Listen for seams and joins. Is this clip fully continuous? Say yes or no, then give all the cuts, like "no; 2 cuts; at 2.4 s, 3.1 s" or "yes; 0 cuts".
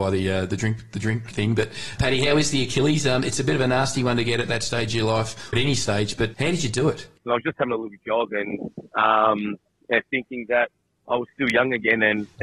no; 4 cuts; at 1.3 s, 2.0 s, 5.5 s, 6.3 s